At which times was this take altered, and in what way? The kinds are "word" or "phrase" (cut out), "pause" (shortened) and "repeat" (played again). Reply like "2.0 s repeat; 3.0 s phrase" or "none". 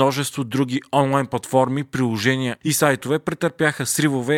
none